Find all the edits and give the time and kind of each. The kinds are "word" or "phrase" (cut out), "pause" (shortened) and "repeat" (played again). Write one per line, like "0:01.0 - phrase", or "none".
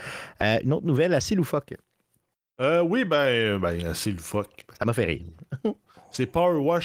none